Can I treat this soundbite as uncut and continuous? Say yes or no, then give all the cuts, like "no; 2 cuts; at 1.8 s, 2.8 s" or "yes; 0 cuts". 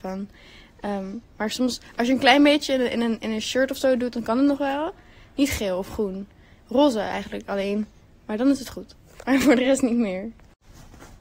yes; 0 cuts